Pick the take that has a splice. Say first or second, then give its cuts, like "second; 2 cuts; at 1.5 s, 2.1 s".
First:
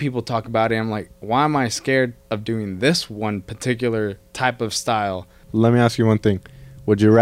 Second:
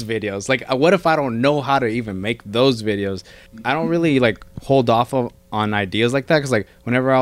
first; 2 cuts; at 1.2 s, 2.2 s